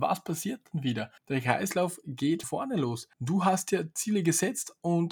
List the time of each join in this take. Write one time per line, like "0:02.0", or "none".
0:01.2
0:02.4
0:03.1